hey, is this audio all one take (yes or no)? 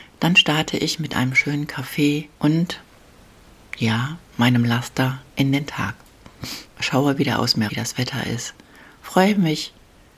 no